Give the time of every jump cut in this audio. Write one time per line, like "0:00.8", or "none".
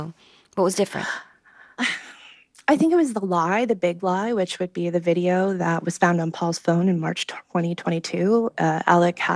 0:01.8